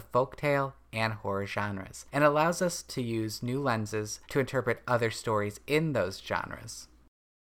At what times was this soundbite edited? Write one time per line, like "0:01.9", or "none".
0:02.1
0:04.2